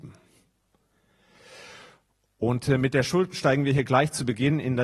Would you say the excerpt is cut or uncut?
uncut